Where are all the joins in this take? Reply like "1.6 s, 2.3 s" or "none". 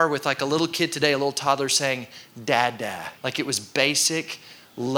3.2 s